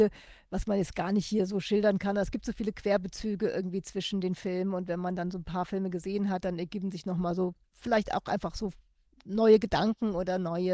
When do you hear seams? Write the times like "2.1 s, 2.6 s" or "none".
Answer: none